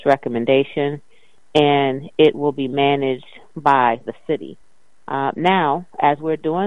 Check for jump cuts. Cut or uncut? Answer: uncut